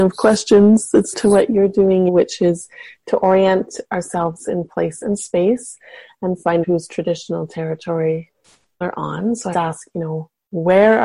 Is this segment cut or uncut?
cut